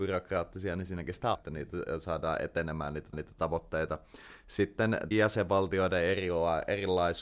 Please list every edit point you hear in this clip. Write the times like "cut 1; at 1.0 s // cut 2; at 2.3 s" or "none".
cut 1; at 1.3 s // cut 2; at 3.1 s // cut 3; at 5.1 s

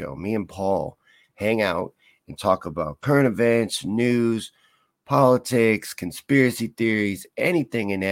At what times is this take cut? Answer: none

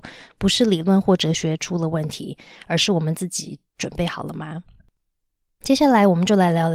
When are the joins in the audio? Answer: none

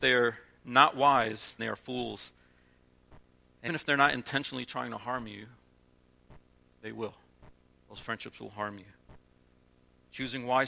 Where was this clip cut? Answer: cut 1; at 1.6 s // cut 2; at 3.7 s // cut 3; at 7.8 s

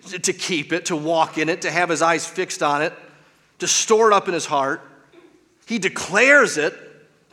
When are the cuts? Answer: none

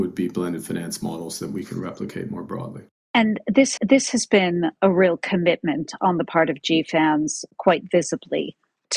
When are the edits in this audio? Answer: cut 1; at 3.8 s // cut 2; at 4.8 s

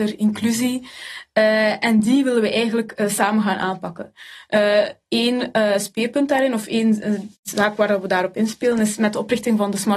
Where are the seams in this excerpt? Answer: cut 1; at 7.3 s

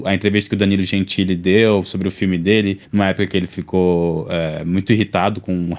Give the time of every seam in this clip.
cut 1; at 2.8 s

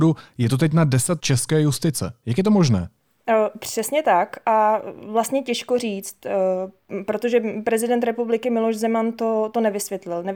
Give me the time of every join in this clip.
cut 1; at 1.2 s

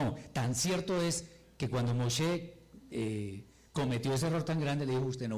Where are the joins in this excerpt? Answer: none

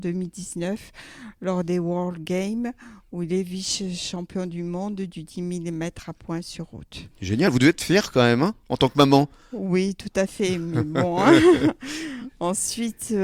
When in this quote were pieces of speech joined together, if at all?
cut 1; at 7.1 s

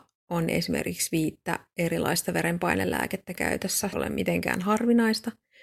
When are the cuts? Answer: cut 1; at 3.9 s

